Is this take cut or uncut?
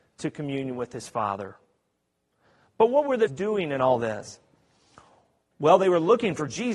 cut